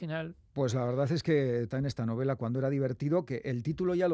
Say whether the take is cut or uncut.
cut